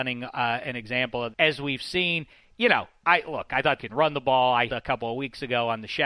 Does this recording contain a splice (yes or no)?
yes